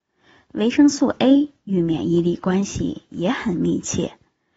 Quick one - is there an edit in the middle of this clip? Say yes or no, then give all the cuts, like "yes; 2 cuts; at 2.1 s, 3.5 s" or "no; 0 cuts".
no; 0 cuts